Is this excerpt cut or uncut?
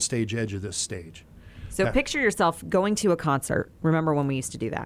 uncut